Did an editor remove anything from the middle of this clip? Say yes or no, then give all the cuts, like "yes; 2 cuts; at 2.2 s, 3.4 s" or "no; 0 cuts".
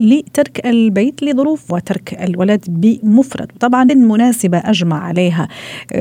yes; 2 cuts; at 1.7 s, 3.9 s